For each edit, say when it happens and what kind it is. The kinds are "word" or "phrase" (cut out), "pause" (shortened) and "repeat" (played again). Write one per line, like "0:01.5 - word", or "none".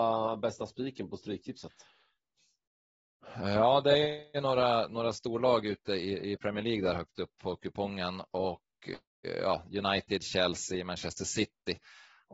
none